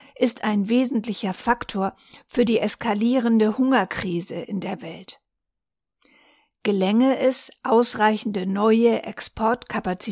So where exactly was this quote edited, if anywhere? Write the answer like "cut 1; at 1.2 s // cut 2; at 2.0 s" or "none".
none